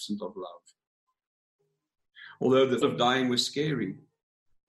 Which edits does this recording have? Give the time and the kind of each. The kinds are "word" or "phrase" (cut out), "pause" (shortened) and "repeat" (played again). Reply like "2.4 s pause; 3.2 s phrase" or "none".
2.8 s word

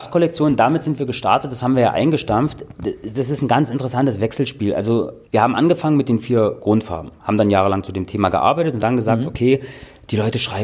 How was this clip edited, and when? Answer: 5.3 s pause; 8.8 s word

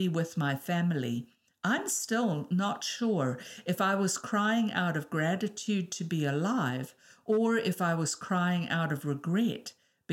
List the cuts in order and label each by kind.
none

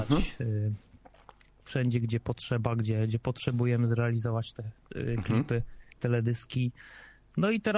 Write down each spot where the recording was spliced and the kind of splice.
5.9 s pause

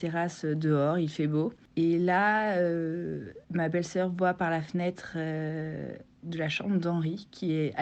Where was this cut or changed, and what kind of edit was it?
3.4 s pause

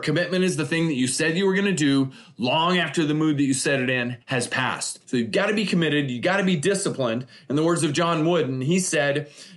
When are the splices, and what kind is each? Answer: 4.2 s pause; 5.0 s pause

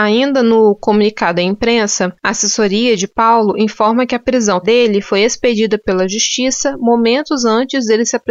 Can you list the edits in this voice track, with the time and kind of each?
4.6 s word

